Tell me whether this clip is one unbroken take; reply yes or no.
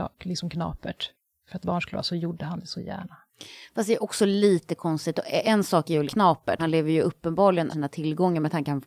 no